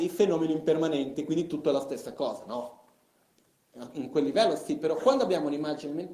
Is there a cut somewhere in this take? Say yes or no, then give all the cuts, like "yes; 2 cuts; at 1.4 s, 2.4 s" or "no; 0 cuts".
no; 0 cuts